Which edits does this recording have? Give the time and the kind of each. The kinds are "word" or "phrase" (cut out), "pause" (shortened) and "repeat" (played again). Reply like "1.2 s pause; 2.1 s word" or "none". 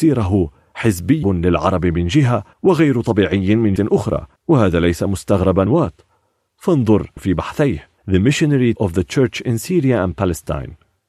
1.2 s word; 2.5 s pause; 3.8 s word; 4.4 s pause; 5.7 s word; 7.2 s phrase; 8.0 s pause; 8.8 s word

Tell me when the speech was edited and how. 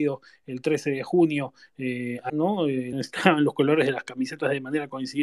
2.3 s word; 2.9 s word

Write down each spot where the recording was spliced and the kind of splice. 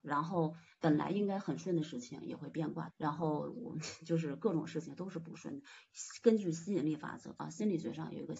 2.9 s phrase

